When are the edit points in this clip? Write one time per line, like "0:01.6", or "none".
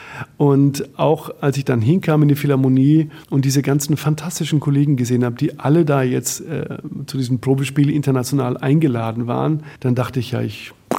0:03.2
0:09.8